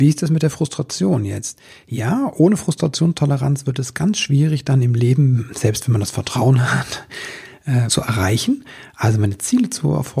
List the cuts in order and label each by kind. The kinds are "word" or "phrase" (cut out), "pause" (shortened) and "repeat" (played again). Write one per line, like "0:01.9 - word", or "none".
0:07.9 - word